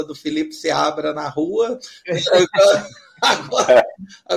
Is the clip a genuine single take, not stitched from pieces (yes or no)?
yes